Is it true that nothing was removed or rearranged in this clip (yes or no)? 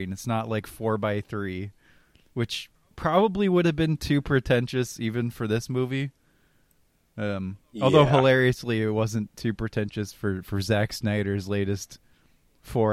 yes